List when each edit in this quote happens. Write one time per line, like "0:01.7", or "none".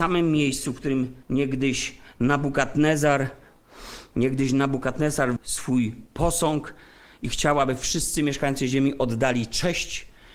0:01.2
0:05.4